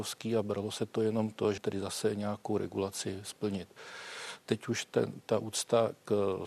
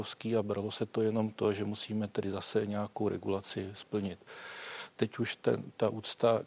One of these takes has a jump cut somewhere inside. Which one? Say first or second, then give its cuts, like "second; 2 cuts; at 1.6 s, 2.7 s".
first; 1 cut; at 1.6 s